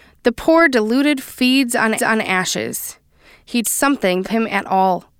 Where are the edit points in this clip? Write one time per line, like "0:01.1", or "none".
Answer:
0:01.2
0:02.0
0:03.6
0:04.2